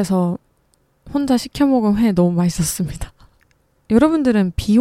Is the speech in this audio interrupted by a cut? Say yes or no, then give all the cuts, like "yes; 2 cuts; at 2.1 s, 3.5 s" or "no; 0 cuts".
no; 0 cuts